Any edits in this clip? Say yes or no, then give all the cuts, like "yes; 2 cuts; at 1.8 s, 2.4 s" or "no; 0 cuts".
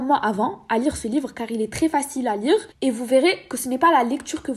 yes; 1 cut; at 2.7 s